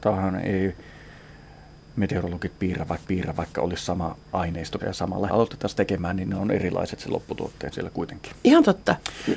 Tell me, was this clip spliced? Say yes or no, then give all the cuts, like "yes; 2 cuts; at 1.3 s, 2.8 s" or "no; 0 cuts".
yes; 4 cuts; at 3.1 s, 4.8 s, 5.3 s, 7.7 s